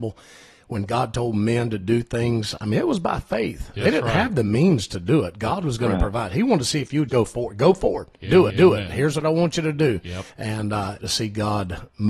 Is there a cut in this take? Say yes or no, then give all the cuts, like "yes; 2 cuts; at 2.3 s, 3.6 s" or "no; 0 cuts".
yes; 4 cuts; at 7.1 s, 8.5 s, 10.3 s, 11.0 s